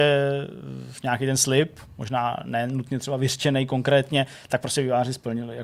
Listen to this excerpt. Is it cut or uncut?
uncut